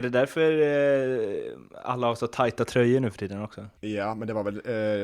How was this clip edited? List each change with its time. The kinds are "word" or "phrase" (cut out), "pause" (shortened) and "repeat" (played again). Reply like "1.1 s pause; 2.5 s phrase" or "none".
3.8 s pause